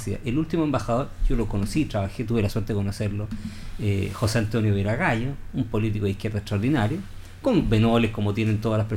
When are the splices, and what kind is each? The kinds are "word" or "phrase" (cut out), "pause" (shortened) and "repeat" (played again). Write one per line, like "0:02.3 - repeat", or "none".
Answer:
none